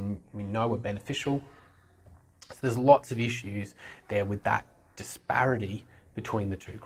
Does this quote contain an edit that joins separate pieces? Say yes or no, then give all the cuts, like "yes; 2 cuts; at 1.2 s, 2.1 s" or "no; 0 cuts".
no; 0 cuts